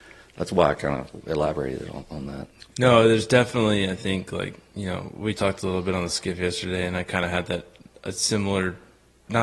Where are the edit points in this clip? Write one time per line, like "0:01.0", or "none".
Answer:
none